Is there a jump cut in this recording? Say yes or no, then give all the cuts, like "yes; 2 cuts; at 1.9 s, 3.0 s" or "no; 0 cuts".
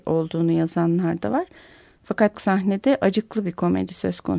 yes; 1 cut; at 2.3 s